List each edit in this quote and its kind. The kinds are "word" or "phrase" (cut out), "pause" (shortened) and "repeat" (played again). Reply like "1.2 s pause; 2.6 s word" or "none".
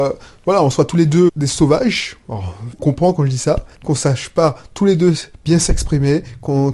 1.3 s word; 2.8 s phrase; 3.7 s pause

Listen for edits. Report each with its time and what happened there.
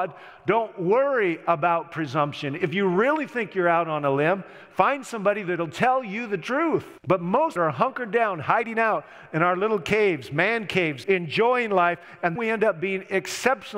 7.0 s pause; 7.6 s phrase; 11.0 s word; 12.4 s word

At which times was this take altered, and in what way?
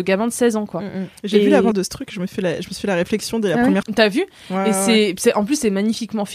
1.7 s word; 3.8 s word

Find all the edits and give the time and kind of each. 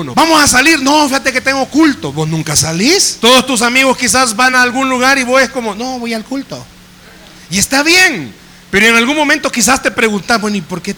none

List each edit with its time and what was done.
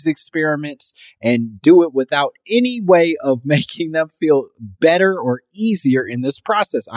none

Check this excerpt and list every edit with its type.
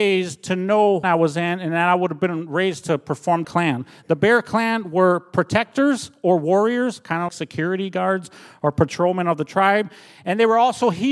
1.0 s phrase; 3.4 s phrase; 7.3 s word

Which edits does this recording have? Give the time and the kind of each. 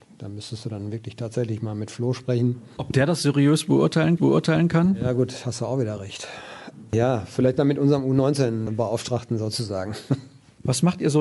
4.2 s repeat

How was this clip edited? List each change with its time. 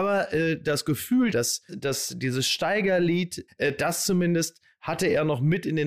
1.3 s word; 1.7 s word; 3.5 s phrase

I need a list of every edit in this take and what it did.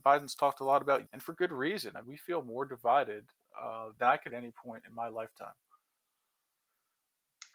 1.1 s word; 2.0 s word; 4.0 s word; 4.3 s word

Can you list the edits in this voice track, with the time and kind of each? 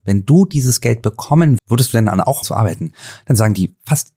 1.6 s word; 2.4 s word

